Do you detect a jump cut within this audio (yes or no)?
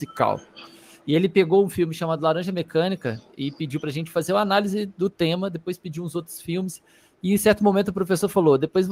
no